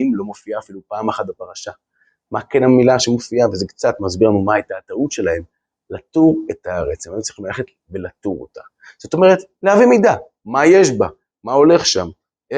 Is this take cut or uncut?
uncut